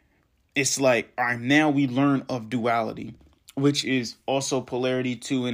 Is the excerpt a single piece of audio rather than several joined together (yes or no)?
yes